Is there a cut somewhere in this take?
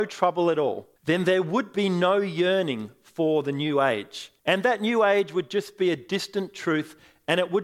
yes; 2 cuts; at 1.0 s, 4.4 s

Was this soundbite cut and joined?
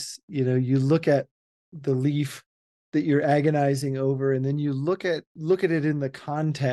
no; 0 cuts

